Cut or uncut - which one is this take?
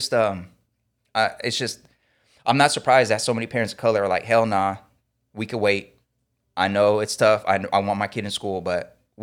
uncut